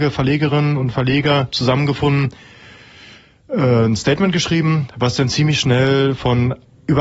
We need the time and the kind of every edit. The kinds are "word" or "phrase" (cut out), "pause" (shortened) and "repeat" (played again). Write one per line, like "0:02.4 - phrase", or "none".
none